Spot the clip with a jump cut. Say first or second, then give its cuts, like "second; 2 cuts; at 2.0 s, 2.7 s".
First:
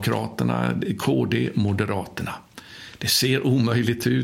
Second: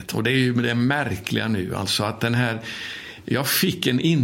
first; 1 cut; at 1.5 s